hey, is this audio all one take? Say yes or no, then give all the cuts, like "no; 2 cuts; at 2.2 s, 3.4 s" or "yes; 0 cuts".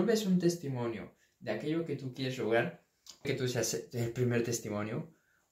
no; 1 cut; at 3.2 s